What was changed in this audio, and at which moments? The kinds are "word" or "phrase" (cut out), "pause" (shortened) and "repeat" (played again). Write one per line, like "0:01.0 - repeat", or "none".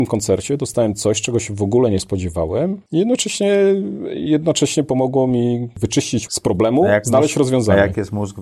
0:06.3 - word